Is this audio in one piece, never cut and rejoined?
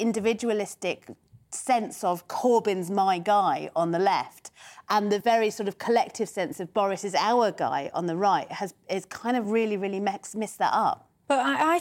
yes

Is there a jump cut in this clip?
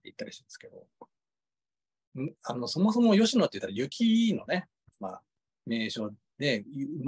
no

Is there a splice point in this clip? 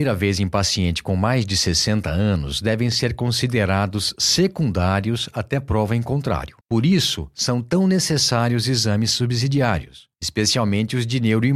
yes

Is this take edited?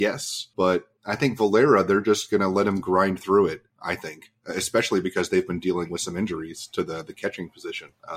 yes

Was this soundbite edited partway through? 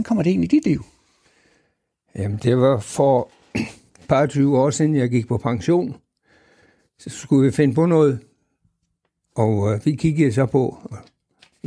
no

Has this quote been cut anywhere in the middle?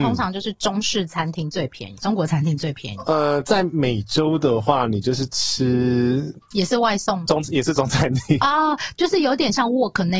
yes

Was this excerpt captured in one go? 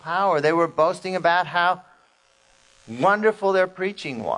yes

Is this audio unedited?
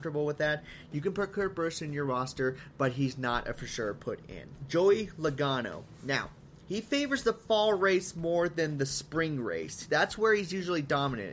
yes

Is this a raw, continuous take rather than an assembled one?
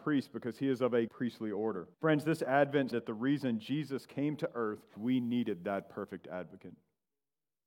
no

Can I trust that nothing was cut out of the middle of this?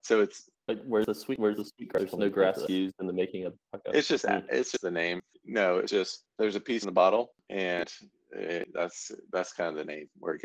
yes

